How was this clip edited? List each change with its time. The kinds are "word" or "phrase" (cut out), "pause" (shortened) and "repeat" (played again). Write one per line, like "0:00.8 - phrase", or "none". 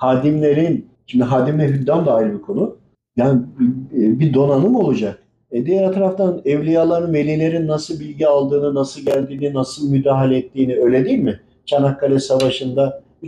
none